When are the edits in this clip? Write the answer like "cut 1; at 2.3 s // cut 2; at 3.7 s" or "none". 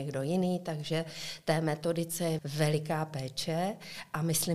cut 1; at 2.4 s